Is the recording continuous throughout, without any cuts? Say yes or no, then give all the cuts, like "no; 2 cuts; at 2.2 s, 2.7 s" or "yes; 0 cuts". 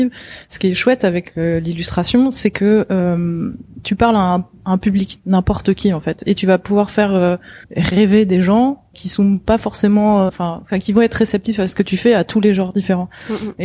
no; 3 cuts; at 7.6 s, 8.9 s, 10.3 s